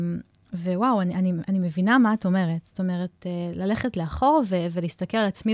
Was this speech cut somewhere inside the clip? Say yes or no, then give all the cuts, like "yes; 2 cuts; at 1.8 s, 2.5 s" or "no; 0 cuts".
no; 0 cuts